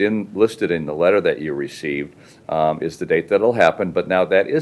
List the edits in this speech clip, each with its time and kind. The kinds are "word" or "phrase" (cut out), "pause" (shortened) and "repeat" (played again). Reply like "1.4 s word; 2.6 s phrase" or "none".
none

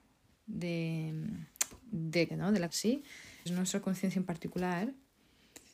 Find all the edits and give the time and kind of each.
2.3 s word; 2.7 s word; 3.5 s word

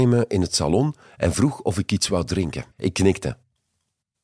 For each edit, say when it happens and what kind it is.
2.7 s pause

